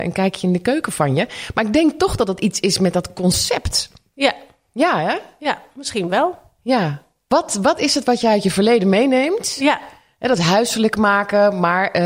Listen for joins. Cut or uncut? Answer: uncut